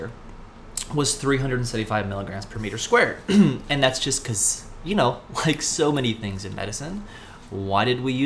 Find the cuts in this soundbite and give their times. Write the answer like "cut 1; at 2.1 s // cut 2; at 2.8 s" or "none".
none